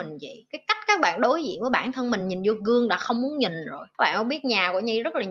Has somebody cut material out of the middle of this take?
no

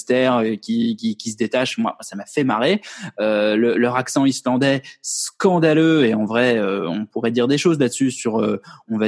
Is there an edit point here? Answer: no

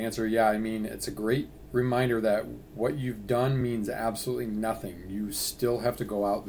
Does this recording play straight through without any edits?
yes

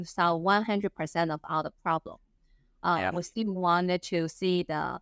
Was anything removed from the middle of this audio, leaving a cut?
no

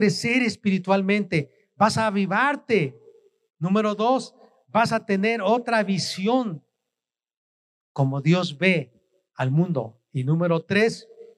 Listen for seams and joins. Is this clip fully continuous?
yes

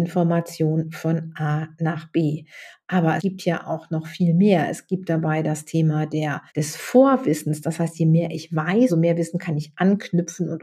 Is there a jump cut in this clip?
yes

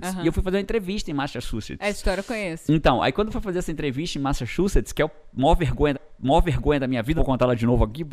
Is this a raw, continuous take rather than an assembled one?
no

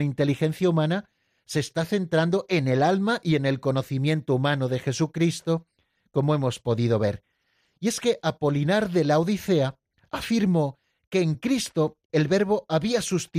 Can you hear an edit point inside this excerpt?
no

